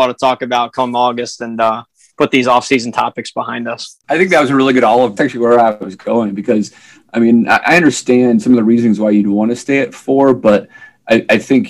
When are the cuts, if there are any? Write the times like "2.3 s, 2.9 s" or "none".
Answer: 5.2 s